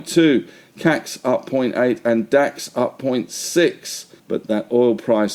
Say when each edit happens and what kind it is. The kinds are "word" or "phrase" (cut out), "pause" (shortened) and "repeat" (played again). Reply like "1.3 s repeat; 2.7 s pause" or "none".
4.2 s pause